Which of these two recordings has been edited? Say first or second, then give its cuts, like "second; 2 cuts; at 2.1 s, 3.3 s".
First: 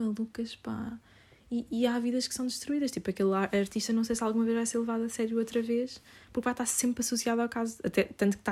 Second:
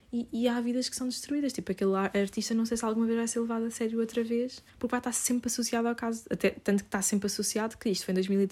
second; 1 cut; at 4.7 s